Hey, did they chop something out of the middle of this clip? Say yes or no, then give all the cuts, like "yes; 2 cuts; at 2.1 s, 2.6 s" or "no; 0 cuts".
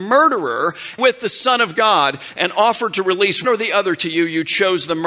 yes; 2 cuts; at 1.0 s, 3.4 s